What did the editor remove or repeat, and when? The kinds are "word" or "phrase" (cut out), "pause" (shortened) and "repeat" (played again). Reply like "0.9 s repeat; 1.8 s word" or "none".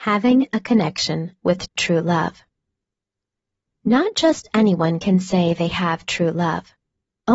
none